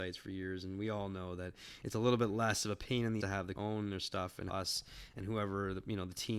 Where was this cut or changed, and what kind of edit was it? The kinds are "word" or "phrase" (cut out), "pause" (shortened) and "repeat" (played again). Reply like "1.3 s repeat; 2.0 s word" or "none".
3.2 s word; 3.5 s word; 4.5 s word